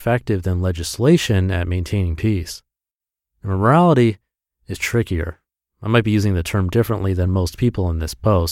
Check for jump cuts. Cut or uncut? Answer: uncut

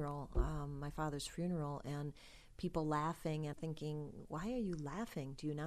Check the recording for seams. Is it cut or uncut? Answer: cut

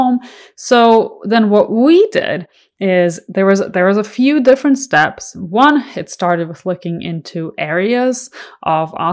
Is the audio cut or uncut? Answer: uncut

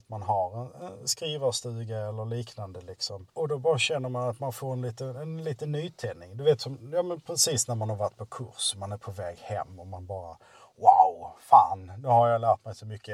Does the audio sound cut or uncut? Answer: cut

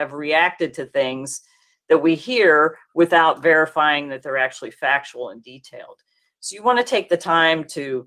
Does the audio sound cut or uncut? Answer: uncut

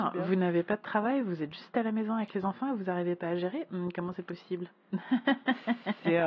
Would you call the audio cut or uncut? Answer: uncut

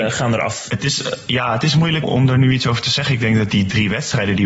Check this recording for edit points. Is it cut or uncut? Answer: cut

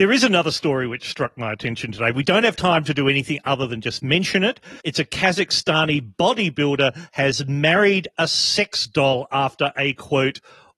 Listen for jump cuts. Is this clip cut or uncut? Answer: cut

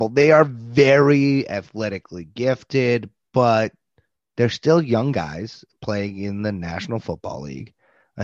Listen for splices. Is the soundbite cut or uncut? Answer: uncut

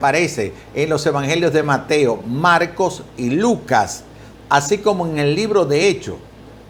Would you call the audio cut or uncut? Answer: uncut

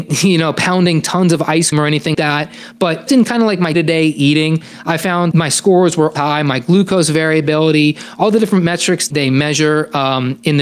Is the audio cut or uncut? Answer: cut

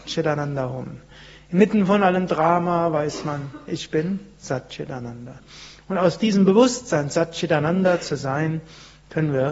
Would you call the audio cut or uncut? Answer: uncut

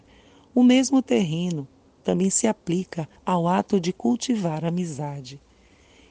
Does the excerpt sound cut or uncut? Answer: cut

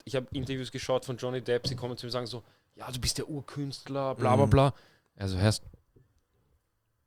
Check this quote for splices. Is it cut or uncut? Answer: uncut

